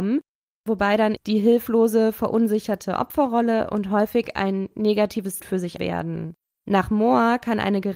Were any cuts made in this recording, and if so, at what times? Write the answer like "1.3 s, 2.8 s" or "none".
1.2 s, 5.4 s, 5.8 s